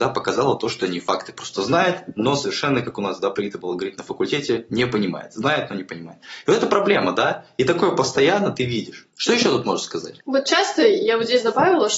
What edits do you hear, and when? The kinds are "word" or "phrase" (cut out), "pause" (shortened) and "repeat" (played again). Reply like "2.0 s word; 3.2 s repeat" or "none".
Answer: 9.1 s pause; 10.2 s pause